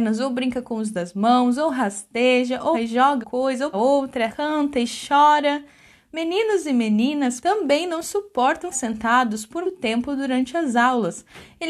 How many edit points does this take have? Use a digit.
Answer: 8